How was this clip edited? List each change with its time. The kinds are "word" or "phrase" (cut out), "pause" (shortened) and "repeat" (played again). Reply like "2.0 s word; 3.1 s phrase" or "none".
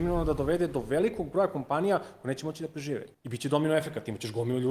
3.1 s pause